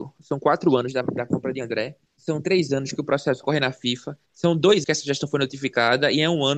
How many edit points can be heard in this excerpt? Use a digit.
4